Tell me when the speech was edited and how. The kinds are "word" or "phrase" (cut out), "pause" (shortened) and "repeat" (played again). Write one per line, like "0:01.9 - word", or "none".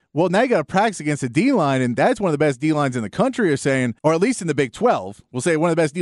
0:04.0 - pause